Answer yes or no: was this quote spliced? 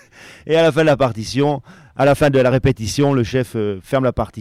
no